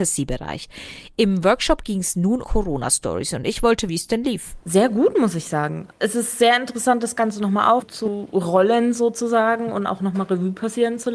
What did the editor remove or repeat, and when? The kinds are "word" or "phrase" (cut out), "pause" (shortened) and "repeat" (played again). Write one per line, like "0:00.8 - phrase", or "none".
0:02.4 - word
0:03.9 - word